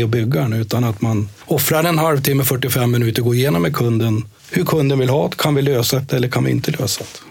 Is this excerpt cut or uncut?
cut